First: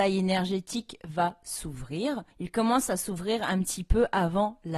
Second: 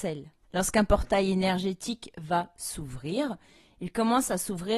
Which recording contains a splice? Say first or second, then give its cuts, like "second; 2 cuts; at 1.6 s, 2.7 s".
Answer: first; 1 cut; at 2.3 s